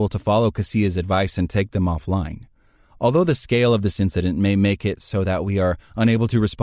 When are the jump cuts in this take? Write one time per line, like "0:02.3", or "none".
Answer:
none

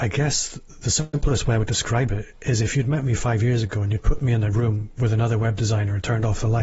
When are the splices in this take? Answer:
0:02.3

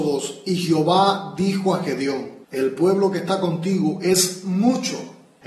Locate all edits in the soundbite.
0:02.4

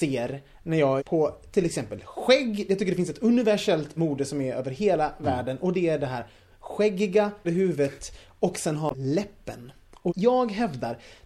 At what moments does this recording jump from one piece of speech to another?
0:01.0
0:04.0
0:07.4
0:08.9
0:10.1

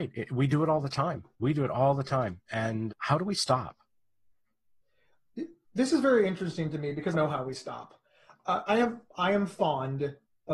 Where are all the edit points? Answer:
0:01.3
0:02.9
0:07.1
0:08.7

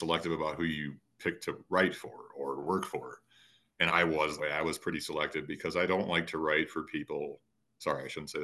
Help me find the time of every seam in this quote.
0:03.9
0:04.4

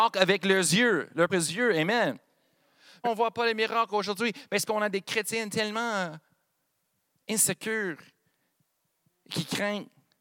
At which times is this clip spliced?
0:01.3
0:03.0
0:04.7

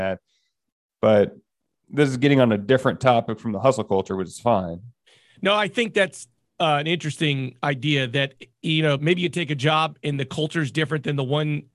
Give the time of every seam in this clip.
none

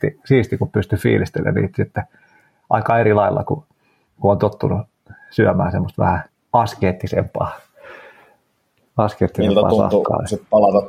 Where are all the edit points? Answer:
0:06.3

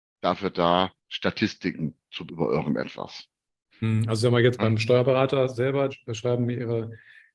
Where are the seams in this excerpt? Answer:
0:01.0
0:02.3
0:04.6
0:05.9

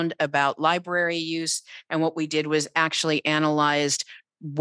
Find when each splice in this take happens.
none

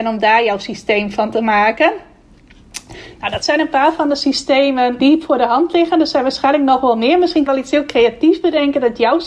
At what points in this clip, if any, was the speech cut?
0:05.0
0:07.5

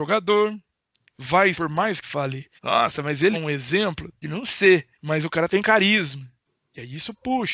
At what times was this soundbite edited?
0:01.1
0:01.5
0:02.0
0:02.6
0:03.3
0:04.2
0:04.9

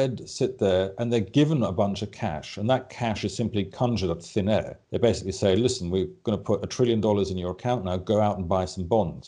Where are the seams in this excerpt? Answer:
0:04.8

